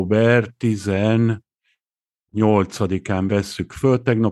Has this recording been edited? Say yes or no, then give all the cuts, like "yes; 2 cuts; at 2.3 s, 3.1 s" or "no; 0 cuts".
no; 0 cuts